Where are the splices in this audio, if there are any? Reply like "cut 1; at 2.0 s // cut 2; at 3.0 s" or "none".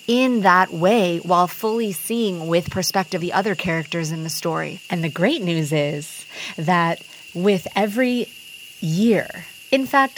cut 1; at 3.2 s